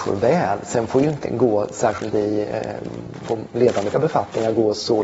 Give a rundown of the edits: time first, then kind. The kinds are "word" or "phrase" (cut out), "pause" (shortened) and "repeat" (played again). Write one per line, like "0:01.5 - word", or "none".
0:01.2 - word
0:02.1 - word
0:03.9 - word